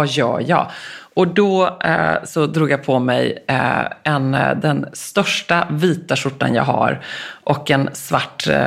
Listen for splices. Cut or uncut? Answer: uncut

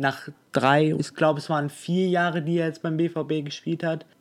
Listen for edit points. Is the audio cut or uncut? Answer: cut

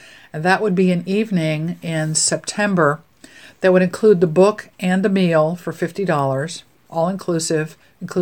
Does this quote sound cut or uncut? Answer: uncut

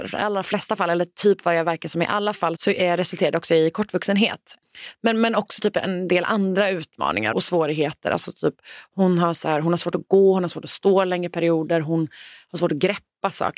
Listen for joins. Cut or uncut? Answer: cut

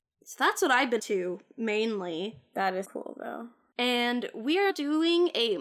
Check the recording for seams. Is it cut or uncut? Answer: cut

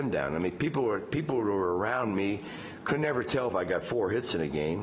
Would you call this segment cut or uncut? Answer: uncut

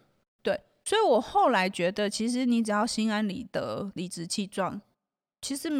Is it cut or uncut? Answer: uncut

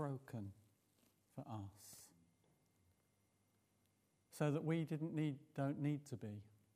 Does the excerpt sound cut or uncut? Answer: uncut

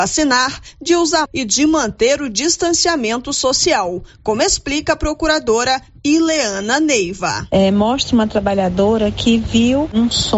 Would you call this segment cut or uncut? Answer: cut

